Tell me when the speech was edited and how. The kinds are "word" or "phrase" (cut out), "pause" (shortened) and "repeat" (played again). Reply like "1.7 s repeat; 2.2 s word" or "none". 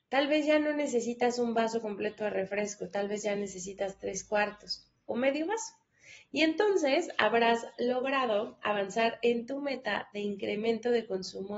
none

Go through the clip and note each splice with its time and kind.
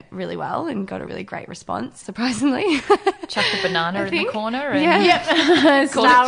1.1 s word

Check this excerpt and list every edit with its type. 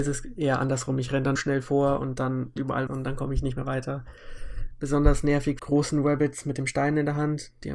1.4 s phrase; 2.6 s word; 2.9 s word; 5.6 s phrase

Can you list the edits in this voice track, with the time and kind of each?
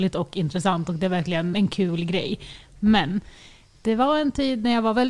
1.5 s word

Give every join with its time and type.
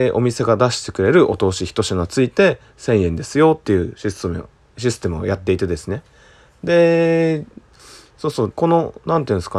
8.5 s word

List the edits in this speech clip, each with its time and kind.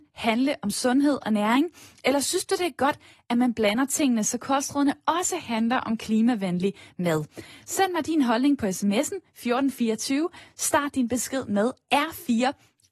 none

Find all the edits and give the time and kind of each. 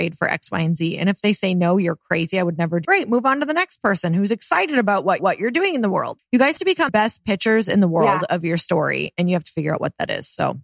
2.8 s word; 5.2 s repeat; 6.2 s word; 6.6 s word; 6.9 s word

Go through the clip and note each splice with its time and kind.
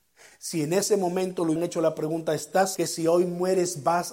1.6 s word; 2.8 s word

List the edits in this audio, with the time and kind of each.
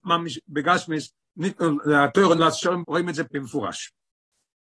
2.4 s word; 2.8 s word; 3.3 s word

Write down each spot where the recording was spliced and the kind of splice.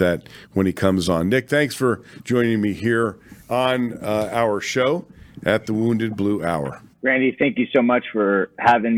6.9 s pause

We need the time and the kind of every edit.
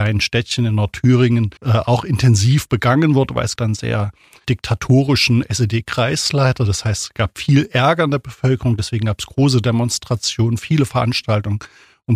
1.6 s pause; 3.6 s word; 4.4 s word

